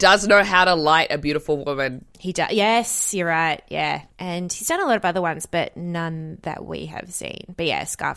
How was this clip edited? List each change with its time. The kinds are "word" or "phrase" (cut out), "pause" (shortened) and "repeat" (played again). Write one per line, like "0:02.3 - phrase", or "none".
0:04.1 - pause